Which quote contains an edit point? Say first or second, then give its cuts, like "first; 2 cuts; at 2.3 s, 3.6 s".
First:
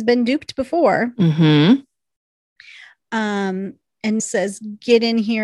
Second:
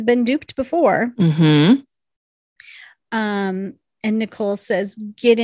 first; 1 cut; at 4.2 s